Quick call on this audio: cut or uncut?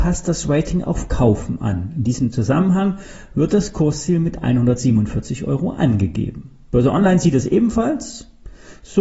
uncut